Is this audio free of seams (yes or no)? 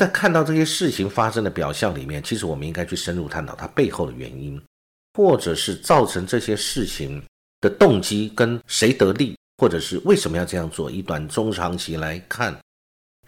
no